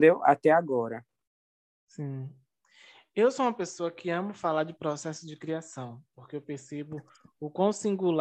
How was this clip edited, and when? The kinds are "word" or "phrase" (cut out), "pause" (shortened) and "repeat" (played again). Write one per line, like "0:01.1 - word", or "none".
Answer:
none